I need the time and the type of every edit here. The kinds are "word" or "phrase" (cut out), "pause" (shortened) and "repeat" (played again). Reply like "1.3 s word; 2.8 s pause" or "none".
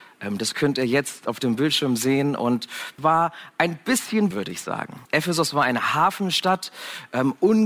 3.0 s word; 4.3 s phrase; 5.1 s pause